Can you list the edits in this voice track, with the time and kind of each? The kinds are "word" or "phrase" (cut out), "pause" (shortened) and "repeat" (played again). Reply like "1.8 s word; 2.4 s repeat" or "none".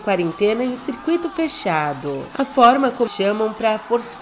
3.1 s word

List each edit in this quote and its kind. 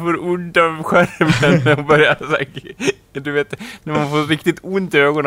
none

